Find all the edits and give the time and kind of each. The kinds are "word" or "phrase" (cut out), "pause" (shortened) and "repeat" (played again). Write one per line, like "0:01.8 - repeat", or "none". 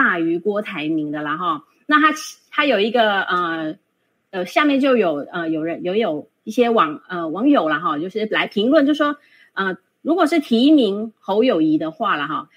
none